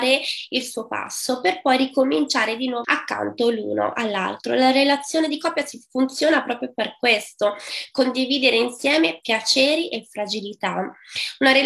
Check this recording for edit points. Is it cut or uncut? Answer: cut